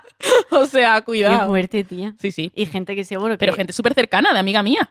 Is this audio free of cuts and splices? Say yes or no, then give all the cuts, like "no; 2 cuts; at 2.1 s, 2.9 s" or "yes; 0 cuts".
yes; 0 cuts